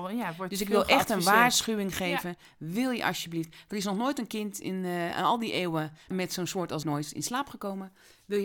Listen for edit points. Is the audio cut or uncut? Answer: cut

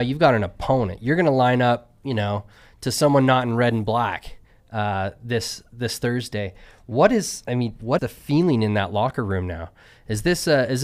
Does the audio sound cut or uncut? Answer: cut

